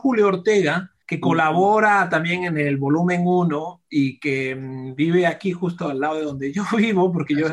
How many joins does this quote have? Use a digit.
1